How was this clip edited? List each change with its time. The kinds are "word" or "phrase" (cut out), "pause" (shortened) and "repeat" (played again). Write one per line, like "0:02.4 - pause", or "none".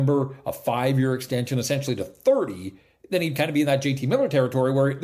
none